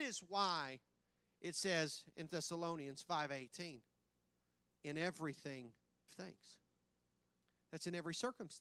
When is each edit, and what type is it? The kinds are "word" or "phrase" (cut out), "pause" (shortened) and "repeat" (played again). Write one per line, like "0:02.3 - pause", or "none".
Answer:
0:02.3 - word
0:06.1 - word